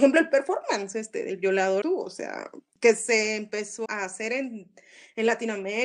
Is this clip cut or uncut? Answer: cut